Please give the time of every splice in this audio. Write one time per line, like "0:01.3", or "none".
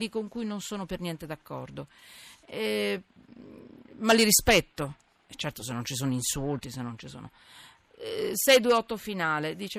none